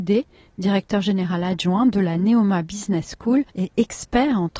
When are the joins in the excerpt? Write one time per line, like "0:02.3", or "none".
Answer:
0:03.5